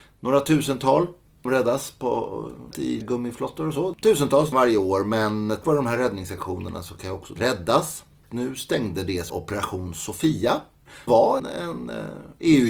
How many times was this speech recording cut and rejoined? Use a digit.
9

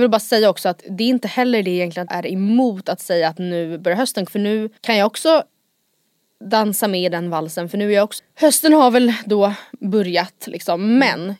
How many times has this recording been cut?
4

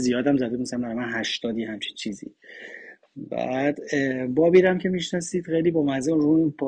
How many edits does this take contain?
0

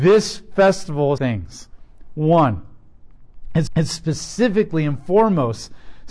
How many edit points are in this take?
2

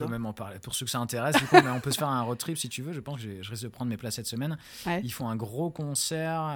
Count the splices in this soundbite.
0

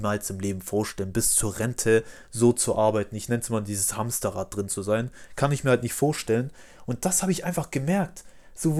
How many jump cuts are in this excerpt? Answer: 0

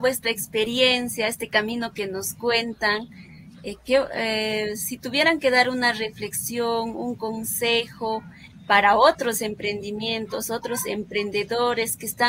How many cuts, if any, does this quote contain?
0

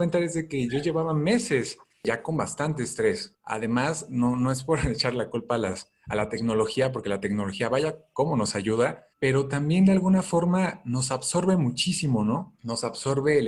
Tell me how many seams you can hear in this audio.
1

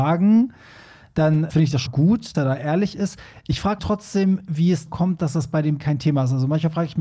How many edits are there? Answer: 6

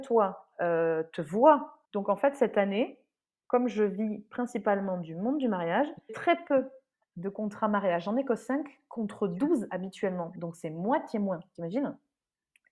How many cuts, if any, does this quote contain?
2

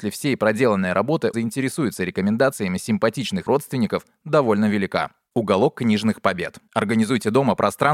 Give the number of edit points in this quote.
2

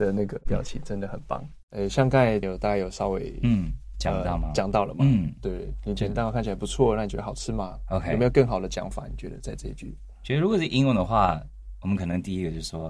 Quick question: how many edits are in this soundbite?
2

